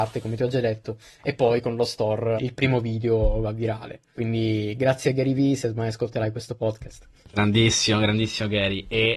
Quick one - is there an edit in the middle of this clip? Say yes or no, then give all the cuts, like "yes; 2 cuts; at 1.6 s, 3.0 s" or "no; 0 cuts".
yes; 2 cuts; at 2.4 s, 7.2 s